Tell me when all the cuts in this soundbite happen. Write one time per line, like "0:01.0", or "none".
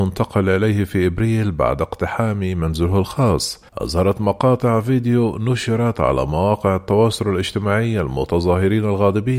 0:03.7